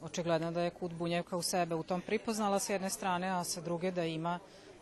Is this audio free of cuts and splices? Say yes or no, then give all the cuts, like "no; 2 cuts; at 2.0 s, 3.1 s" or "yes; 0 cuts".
yes; 0 cuts